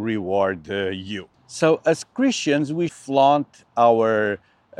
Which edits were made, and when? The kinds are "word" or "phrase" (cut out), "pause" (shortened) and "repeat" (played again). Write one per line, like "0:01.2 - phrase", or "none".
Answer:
0:01.3 - pause
0:02.9 - word